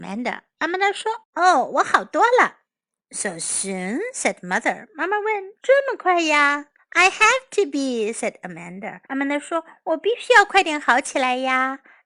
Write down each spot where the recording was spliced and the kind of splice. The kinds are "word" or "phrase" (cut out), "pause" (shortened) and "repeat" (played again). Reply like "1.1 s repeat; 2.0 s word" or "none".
1.2 s pause; 6.8 s pause; 9.0 s pause